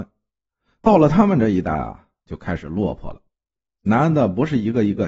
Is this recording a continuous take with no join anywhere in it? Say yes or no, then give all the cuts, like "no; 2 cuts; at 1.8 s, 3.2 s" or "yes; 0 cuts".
yes; 0 cuts